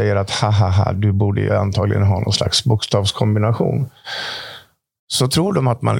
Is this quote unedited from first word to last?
yes; 0 cuts

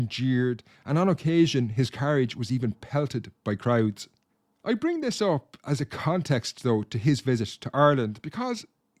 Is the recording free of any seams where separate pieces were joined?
yes; 0 cuts

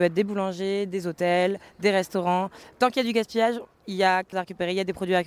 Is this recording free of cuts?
no; 1 cut; at 4.3 s

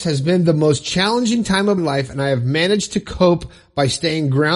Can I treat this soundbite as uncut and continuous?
no; 1 cut; at 1.8 s

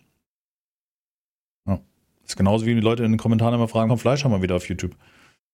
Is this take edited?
yes; 1 cut; at 3.9 s

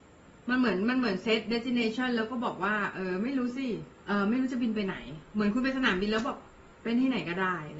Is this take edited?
yes; 1 cut; at 4.0 s

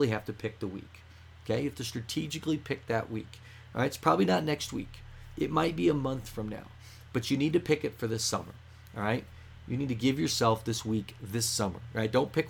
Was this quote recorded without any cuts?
yes; 0 cuts

